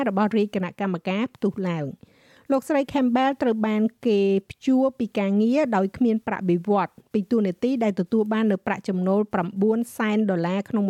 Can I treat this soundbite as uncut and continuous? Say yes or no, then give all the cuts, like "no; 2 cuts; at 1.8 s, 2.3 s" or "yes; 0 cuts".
yes; 0 cuts